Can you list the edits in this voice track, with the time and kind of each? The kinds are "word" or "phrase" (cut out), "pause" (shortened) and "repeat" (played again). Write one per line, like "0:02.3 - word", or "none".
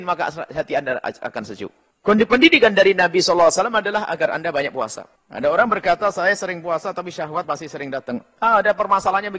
0:07.4 - word